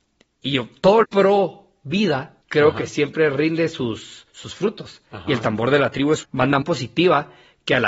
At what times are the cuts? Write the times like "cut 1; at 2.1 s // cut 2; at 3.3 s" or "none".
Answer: cut 1; at 1.0 s // cut 2; at 2.4 s // cut 3; at 4.3 s // cut 4; at 6.2 s // cut 5; at 6.6 s

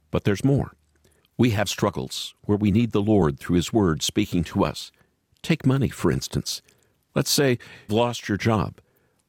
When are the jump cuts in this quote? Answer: cut 1; at 1.7 s // cut 2; at 7.9 s

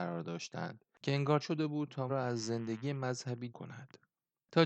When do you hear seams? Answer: cut 1; at 1.4 s // cut 2; at 2.1 s // cut 3; at 3.5 s

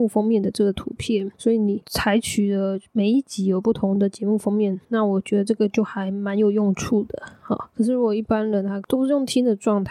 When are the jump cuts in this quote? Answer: cut 1; at 1.3 s // cut 2; at 4.8 s

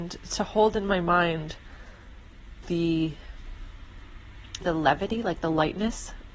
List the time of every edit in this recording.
cut 1; at 2.6 s // cut 2; at 4.6 s

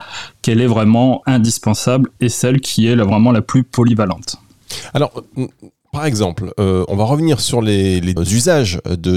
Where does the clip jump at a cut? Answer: cut 1; at 1.2 s // cut 2; at 8.2 s

